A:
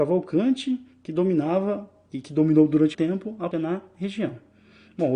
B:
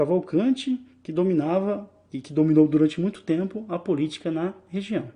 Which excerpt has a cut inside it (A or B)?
A